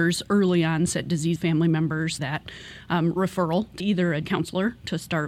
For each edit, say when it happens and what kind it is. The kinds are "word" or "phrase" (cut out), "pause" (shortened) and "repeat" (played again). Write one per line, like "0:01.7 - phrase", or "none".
0:01.4 - phrase
0:02.2 - phrase
0:03.8 - word
0:04.2 - word